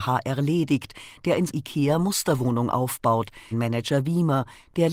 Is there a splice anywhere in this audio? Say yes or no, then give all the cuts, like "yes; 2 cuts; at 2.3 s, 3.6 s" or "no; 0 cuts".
yes; 2 cuts; at 1.5 s, 3.5 s